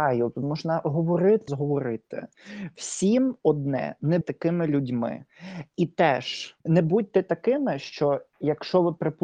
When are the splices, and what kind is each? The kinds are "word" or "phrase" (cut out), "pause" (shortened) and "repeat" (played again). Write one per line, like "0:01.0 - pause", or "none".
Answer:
0:01.5 - phrase
0:04.2 - word
0:06.6 - pause